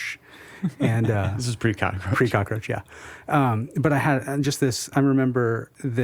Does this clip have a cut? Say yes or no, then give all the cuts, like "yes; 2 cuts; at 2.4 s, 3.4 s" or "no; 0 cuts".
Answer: no; 0 cuts